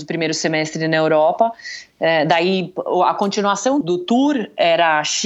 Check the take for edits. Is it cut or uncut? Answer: cut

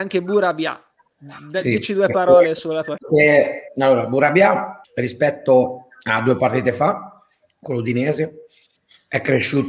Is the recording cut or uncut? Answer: cut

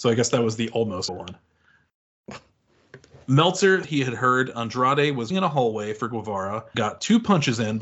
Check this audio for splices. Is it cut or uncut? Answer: cut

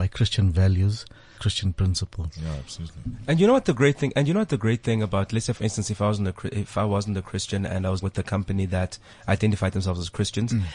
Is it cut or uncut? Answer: cut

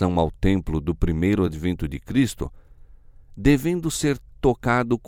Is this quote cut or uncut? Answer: uncut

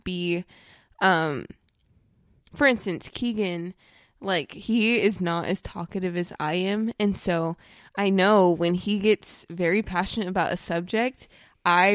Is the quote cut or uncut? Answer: uncut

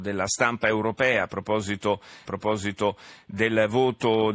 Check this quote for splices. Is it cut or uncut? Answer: cut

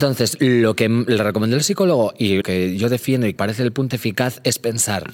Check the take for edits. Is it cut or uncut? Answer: cut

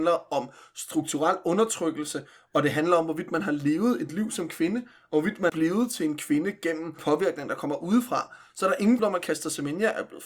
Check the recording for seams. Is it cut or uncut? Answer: cut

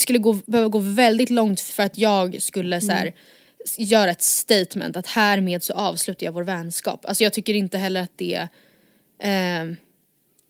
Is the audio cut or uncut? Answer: cut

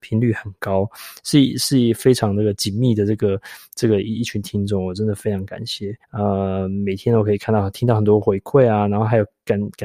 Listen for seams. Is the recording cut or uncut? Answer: cut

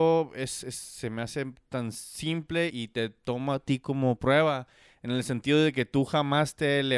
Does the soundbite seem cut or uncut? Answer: cut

